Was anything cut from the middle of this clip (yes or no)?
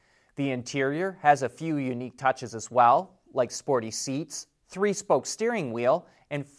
no